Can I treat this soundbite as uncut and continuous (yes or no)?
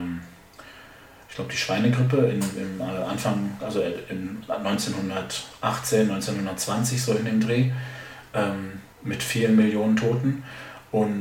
no